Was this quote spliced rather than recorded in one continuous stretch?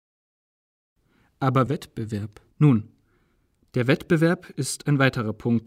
yes; 2 cuts; at 1.7 s, 2.5 s

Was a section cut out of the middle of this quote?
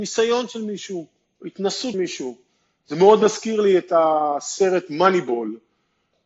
yes; 1 cut; at 1.9 s

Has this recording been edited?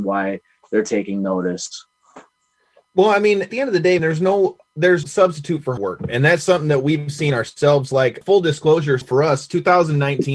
yes; 6 cuts; at 3.5 s, 4.0 s, 5.0 s, 5.8 s, 8.2 s, 9.0 s

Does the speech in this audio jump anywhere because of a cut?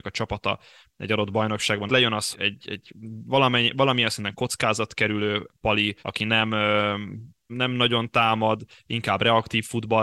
yes; 4 cuts; at 1.9 s, 2.3 s, 6.0 s, 7.5 s

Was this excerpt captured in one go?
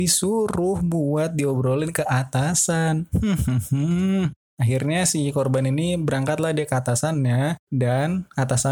no; 1 cut; at 7.6 s

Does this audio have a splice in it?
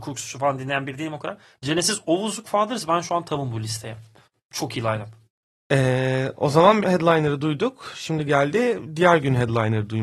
yes; 2 cuts; at 2.4 s, 6.8 s

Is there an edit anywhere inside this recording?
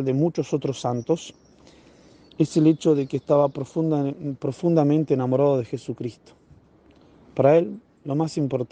no; 0 cuts

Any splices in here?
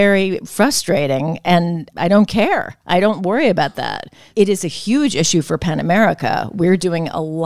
no; 0 cuts

